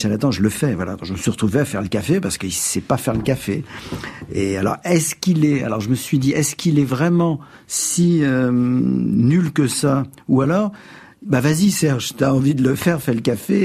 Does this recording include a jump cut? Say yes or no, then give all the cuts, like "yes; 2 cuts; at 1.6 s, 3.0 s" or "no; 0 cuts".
no; 0 cuts